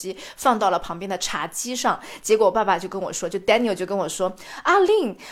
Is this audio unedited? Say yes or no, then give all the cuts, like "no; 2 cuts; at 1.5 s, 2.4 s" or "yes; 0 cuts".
yes; 0 cuts